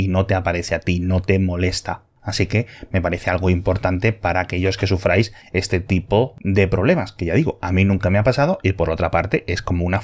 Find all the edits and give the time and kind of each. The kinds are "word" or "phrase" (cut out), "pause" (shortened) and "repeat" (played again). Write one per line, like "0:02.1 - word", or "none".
none